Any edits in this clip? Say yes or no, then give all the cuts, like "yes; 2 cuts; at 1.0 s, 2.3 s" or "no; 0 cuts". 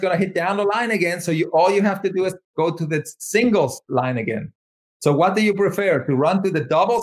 no; 0 cuts